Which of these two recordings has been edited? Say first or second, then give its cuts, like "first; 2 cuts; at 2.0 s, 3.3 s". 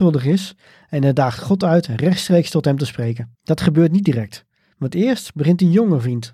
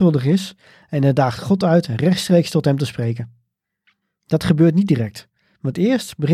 first; 1 cut; at 3.3 s